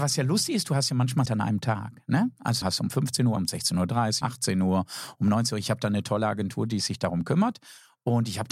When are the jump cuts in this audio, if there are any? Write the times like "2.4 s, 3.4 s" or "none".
1.3 s, 2.6 s, 3.4 s, 4.2 s

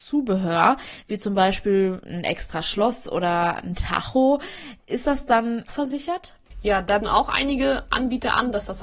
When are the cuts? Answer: 5.7 s, 7.0 s

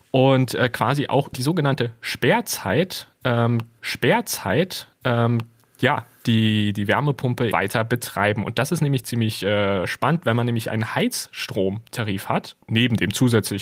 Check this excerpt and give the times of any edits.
1.3 s, 3.8 s, 7.5 s, 9.0 s, 12.6 s

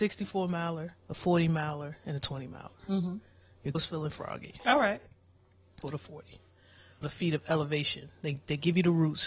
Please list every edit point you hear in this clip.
1.0 s, 3.7 s, 5.8 s, 7.0 s

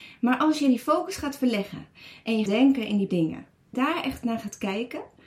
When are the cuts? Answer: 2.5 s, 3.1 s, 3.7 s

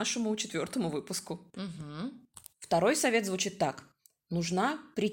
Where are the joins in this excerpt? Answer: 2.5 s

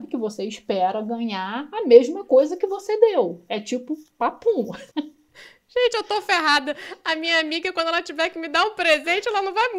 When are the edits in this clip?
4.9 s

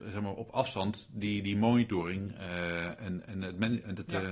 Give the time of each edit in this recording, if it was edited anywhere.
none

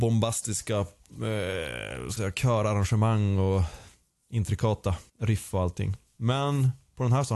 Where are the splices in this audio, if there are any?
2.2 s, 5.1 s

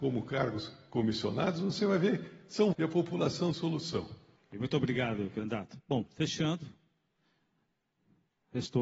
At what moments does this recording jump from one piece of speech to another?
2.7 s, 3.5 s, 4.4 s

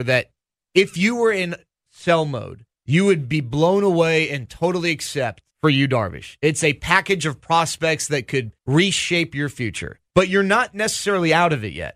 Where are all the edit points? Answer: 2.7 s, 5.5 s, 8.6 s, 10.1 s

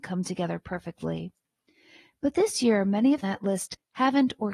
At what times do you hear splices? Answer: 3.2 s

